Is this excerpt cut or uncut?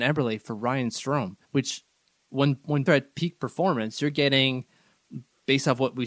cut